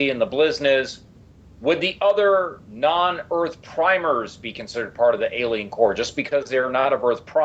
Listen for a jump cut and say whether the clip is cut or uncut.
uncut